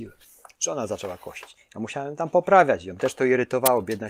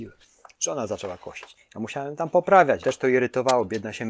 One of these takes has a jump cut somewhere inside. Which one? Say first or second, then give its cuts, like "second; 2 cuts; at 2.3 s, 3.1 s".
second; 1 cut; at 2.8 s